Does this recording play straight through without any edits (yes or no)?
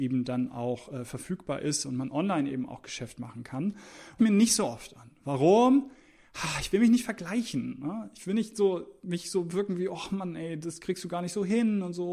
no